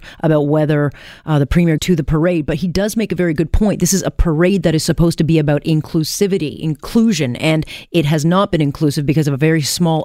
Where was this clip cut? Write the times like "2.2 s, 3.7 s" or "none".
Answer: 1.8 s